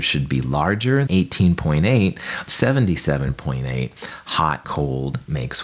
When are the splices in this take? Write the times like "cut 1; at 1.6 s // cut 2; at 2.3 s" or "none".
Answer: cut 1; at 1.1 s // cut 2; at 2.5 s // cut 3; at 4.6 s